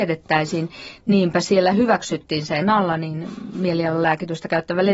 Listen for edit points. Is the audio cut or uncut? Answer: cut